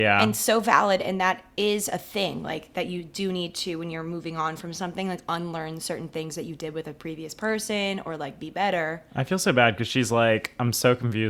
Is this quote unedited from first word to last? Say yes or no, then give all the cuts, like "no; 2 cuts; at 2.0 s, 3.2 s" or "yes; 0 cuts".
yes; 0 cuts